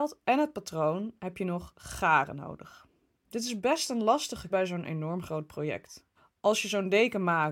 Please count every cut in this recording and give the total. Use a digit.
2